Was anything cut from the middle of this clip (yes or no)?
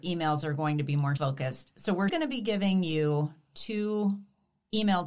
yes